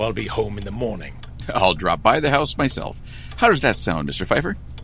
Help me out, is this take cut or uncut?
uncut